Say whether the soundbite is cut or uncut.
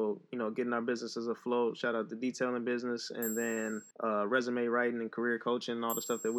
cut